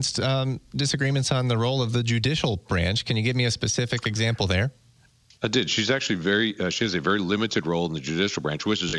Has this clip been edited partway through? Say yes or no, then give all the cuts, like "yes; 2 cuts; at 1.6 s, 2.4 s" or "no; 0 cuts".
no; 0 cuts